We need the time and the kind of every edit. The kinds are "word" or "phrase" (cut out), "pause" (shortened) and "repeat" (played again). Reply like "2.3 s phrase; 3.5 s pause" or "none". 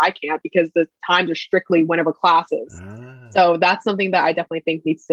none